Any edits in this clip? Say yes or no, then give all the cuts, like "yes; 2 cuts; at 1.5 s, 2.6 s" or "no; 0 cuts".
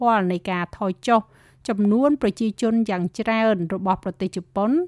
no; 0 cuts